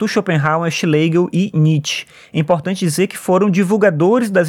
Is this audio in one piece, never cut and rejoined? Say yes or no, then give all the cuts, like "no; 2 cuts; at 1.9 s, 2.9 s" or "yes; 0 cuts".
yes; 0 cuts